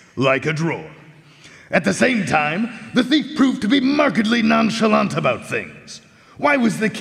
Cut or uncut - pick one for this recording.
uncut